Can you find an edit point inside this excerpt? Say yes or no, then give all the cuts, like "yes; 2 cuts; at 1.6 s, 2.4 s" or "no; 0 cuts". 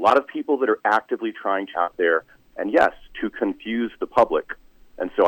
yes; 1 cut; at 1.7 s